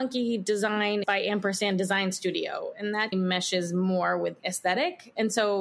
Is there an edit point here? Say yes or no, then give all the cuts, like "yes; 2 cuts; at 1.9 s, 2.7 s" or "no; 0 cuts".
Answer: yes; 3 cuts; at 1.0 s, 3.1 s, 4.4 s